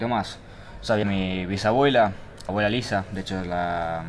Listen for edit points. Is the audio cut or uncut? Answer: cut